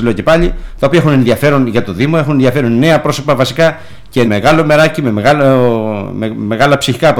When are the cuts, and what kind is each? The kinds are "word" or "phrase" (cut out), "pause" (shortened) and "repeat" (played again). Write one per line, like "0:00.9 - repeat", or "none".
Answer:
0:04.3 - word